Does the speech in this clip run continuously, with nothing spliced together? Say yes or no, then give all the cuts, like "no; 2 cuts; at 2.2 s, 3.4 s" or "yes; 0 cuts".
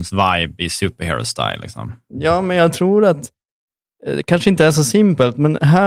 yes; 0 cuts